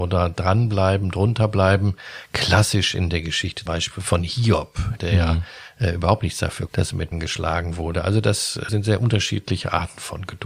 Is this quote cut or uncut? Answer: cut